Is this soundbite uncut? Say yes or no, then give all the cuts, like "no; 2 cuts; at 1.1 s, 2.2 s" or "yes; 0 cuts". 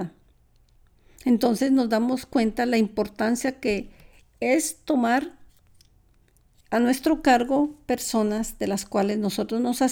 yes; 0 cuts